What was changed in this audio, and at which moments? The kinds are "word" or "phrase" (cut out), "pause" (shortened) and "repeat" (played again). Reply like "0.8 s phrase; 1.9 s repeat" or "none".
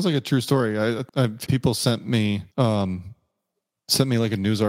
1.1 s pause; 1.5 s word; 2.5 s pause